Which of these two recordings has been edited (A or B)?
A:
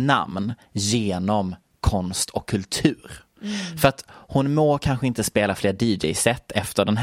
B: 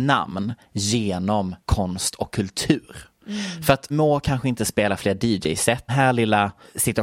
B